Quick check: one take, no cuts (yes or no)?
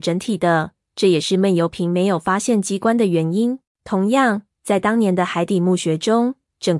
no